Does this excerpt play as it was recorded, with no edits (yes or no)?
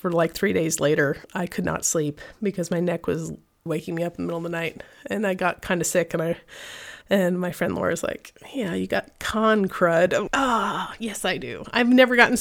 no